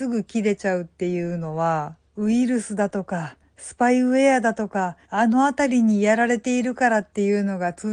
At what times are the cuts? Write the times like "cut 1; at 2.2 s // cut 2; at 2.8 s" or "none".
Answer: cut 1; at 2.1 s // cut 2; at 5.0 s